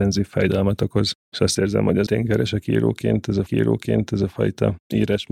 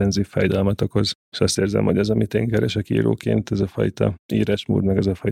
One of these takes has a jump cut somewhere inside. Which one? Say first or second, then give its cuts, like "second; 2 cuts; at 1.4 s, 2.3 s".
first; 2 cuts; at 2.1 s, 3.5 s